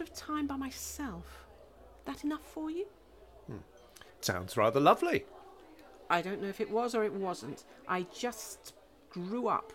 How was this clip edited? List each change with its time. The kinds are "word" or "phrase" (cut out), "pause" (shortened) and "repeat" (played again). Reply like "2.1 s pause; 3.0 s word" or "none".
none